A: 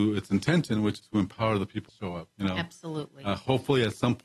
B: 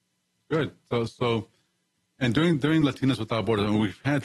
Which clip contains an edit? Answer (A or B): A